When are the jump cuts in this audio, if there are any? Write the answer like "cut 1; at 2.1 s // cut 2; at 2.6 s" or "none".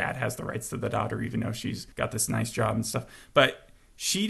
cut 1; at 1.9 s